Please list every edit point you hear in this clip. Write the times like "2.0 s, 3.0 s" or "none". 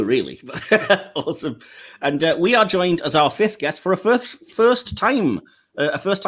none